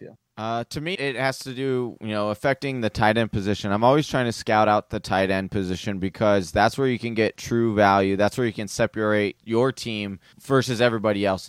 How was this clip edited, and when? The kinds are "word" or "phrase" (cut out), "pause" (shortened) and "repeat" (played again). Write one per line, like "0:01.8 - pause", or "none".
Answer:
0:00.9 - word
0:09.4 - word
0:10.3 - word